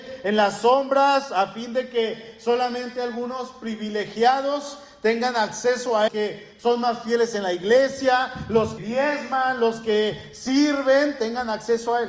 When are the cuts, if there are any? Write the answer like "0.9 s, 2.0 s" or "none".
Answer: 6.1 s, 8.8 s